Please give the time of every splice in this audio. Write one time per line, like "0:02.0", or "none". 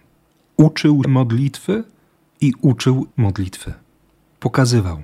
0:01.0
0:03.1

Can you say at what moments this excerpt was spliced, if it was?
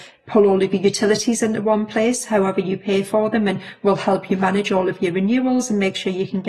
none

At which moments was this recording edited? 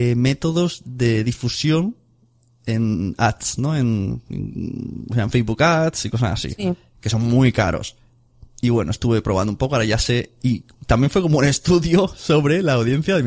none

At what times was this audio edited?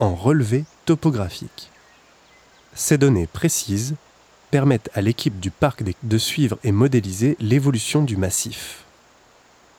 0:05.9

